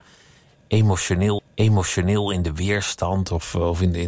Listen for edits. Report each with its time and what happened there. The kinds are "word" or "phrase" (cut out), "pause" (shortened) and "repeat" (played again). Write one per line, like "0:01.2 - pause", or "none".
0:01.4 - repeat